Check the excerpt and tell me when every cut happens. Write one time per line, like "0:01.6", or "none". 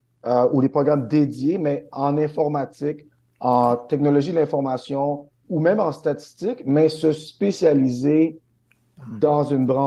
0:05.4